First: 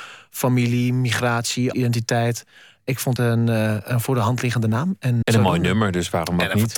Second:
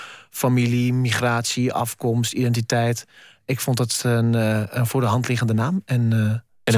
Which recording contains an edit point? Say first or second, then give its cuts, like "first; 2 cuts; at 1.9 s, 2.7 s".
first; 3 cuts; at 1.7 s, 3.2 s, 5.2 s